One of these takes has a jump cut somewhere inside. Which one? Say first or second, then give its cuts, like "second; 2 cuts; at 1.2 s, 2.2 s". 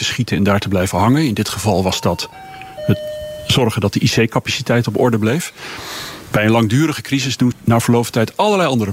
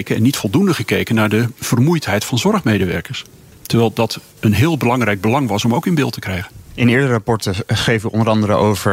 first; 1 cut; at 7.5 s